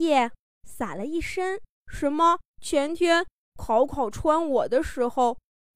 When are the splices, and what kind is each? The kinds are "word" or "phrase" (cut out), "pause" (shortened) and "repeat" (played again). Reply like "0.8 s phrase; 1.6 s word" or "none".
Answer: 1.7 s pause; 2.5 s pause